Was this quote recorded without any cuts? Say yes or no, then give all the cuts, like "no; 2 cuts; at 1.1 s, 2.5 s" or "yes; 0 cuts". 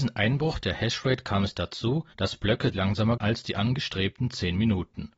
no; 3 cuts; at 2.1 s, 2.7 s, 3.2 s